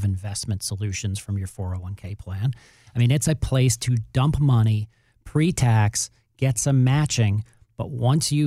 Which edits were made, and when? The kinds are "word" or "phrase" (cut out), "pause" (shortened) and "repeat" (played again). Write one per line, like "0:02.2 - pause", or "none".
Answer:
none